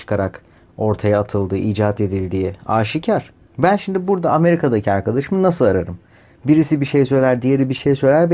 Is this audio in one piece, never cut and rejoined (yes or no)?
yes